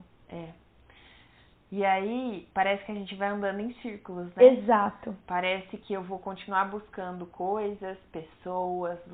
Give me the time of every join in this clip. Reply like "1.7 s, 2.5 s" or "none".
2.5 s, 5.2 s

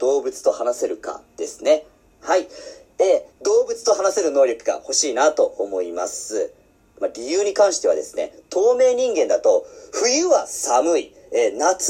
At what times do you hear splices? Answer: 3.3 s

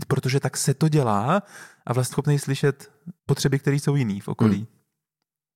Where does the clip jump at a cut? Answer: 2.1 s, 3.2 s

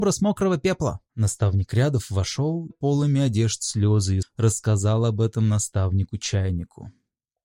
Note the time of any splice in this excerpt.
1.1 s, 2.7 s, 4.2 s

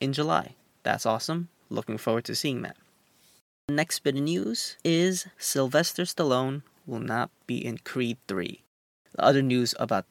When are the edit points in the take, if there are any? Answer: none

